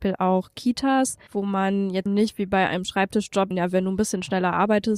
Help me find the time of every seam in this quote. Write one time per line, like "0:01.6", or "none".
0:01.3
0:02.1
0:03.5